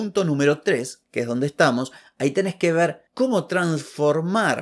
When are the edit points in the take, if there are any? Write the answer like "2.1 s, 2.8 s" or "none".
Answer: none